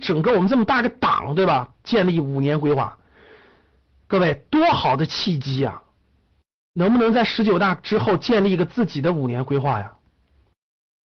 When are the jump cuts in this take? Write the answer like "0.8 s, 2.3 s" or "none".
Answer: none